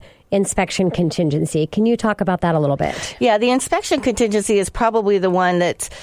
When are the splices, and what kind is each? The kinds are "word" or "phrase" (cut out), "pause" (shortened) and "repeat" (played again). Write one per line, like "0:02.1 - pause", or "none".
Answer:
none